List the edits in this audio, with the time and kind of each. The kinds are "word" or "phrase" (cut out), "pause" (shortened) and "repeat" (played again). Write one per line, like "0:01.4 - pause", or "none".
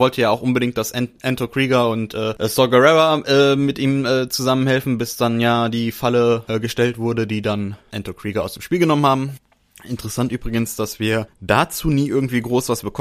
none